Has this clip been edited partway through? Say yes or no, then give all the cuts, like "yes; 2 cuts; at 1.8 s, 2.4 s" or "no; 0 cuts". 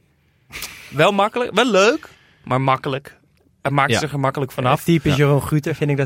no; 0 cuts